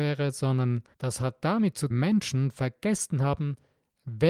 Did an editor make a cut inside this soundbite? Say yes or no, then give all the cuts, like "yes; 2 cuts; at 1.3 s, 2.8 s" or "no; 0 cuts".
yes; 2 cuts; at 0.9 s, 1.9 s